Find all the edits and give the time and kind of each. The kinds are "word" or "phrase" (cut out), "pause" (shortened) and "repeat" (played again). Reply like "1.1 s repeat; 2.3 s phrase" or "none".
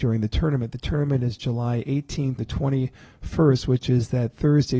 2.4 s word